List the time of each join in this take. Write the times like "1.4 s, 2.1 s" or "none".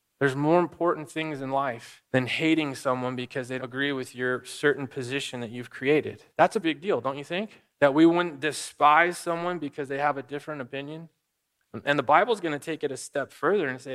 2.1 s, 3.6 s, 6.3 s, 6.6 s, 7.7 s